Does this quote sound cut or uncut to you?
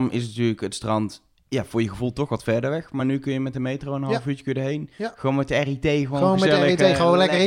uncut